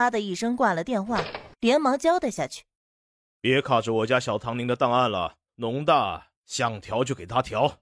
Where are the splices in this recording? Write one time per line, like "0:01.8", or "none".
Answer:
0:02.8
0:05.5
0:06.4